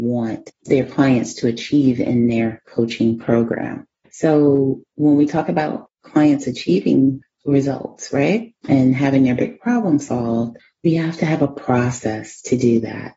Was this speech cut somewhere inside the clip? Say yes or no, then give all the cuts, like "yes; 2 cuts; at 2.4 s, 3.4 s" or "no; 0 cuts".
no; 0 cuts